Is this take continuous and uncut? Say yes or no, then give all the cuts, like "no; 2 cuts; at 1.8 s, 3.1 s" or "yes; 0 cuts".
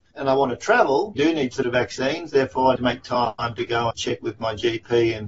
no; 4 cuts; at 1.2 s, 1.6 s, 2.8 s, 3.9 s